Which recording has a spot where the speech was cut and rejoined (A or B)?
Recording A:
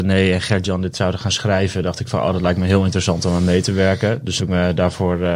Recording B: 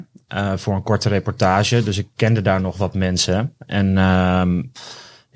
A